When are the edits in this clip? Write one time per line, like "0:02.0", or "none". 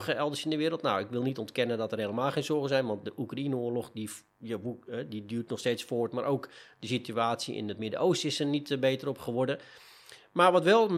none